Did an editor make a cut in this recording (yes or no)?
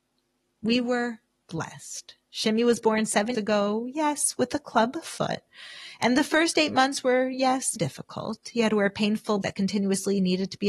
yes